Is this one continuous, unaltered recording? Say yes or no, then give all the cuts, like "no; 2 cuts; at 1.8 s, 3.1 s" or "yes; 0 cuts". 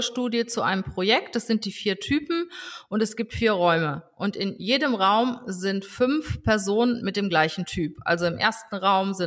yes; 0 cuts